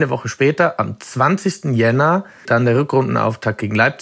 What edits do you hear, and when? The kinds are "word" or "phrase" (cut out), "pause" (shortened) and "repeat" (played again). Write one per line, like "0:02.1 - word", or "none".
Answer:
0:02.5 - word